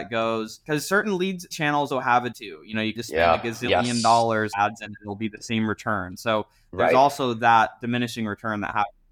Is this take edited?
yes; 5 cuts; at 1.5 s, 1.9 s, 2.3 s, 3.0 s, 4.5 s

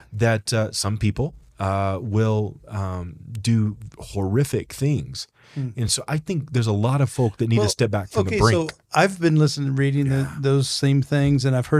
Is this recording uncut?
yes; 0 cuts

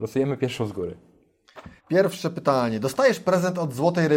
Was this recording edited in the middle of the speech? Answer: yes; 1 cut; at 1.8 s

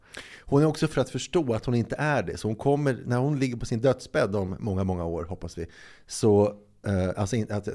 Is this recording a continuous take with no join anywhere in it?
no; 1 cut; at 0.9 s

